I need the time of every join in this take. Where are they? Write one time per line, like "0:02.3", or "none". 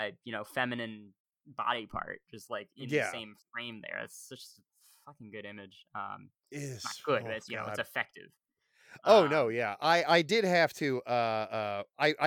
0:01.3